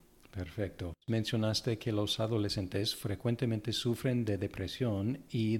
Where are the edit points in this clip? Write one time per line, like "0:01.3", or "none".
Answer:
0:01.0